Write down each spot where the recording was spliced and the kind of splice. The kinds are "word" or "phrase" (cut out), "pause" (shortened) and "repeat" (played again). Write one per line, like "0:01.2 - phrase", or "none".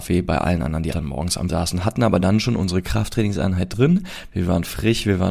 0:00.9 - word
0:01.5 - word